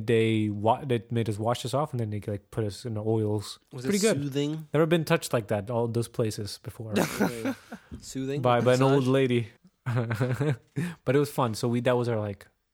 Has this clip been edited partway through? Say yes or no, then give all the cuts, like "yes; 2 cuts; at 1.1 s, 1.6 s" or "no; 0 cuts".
yes; 2 cuts; at 3.6 s, 9.6 s